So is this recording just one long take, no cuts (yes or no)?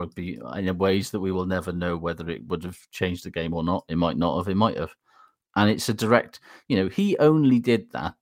yes